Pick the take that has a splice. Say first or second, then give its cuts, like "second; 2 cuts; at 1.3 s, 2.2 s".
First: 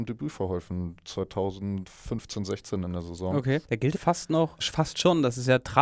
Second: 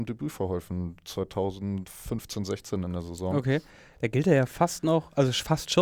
first; 3 cuts; at 3.6 s, 3.9 s, 4.6 s